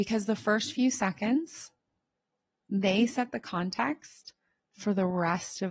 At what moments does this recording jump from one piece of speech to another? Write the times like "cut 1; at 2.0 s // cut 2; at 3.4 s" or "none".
none

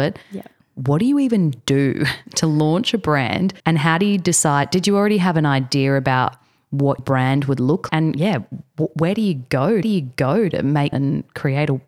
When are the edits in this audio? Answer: cut 1; at 3.6 s // cut 2; at 7.0 s // cut 3; at 7.9 s // cut 4; at 9.8 s // cut 5; at 10.9 s

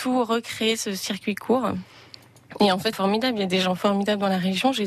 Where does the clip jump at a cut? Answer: cut 1; at 2.9 s

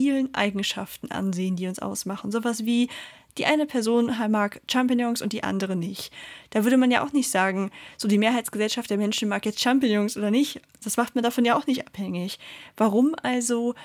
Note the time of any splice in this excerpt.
none

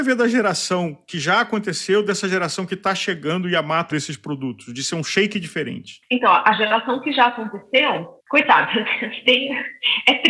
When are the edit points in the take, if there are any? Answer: cut 1; at 3.9 s // cut 2; at 8.2 s

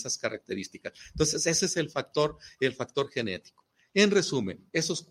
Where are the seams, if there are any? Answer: none

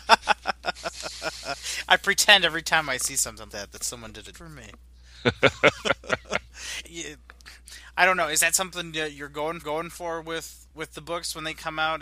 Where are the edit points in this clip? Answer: cut 1; at 3.5 s // cut 2; at 4.3 s // cut 3; at 6.8 s // cut 4; at 9.6 s // cut 5; at 10.7 s

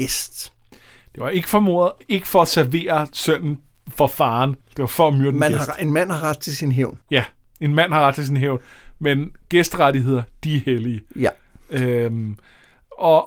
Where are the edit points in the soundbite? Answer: cut 1; at 3.7 s // cut 2; at 4.6 s // cut 3; at 7.0 s

